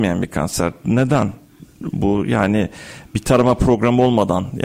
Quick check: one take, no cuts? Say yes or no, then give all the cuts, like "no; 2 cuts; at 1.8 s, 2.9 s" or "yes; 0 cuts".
yes; 0 cuts